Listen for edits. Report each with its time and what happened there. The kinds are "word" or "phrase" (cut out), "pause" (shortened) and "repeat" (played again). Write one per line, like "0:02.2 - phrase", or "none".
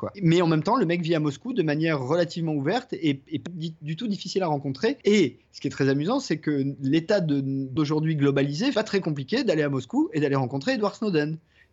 0:03.5 - word
0:07.8 - word
0:08.7 - phrase